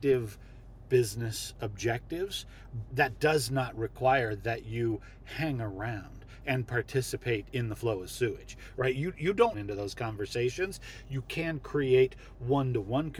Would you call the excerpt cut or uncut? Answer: cut